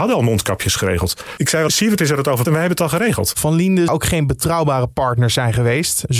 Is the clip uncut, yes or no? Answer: no